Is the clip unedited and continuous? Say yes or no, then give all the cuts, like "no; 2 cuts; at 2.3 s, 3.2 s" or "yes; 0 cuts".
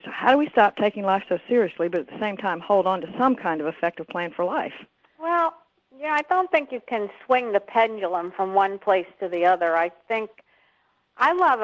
yes; 0 cuts